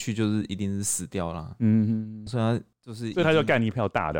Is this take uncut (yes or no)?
no